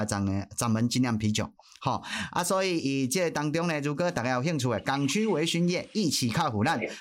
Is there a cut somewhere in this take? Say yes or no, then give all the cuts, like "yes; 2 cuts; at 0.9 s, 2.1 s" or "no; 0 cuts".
no; 0 cuts